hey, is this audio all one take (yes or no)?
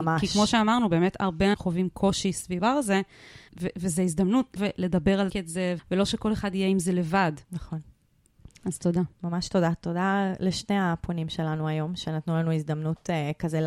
no